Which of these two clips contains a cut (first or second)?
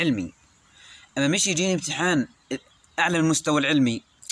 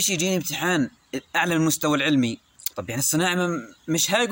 second